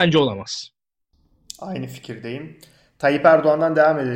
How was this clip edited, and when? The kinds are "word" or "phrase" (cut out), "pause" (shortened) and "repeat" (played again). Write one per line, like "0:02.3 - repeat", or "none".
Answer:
none